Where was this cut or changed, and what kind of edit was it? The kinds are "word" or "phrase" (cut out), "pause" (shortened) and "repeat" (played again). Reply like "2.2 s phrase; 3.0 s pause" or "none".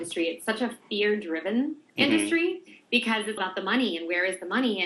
1.9 s pause; 3.4 s word